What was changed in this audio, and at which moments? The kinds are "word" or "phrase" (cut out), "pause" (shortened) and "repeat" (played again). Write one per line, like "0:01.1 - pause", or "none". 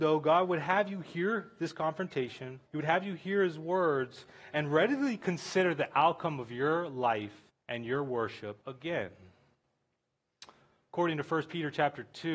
0:02.7 - pause
0:07.5 - pause
0:08.6 - pause